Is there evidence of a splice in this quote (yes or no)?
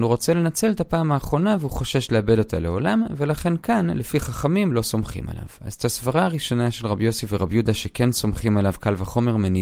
no